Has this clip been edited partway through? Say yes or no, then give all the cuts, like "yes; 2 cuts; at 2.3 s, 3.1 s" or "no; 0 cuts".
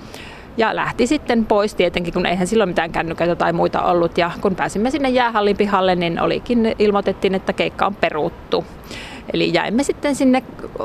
no; 0 cuts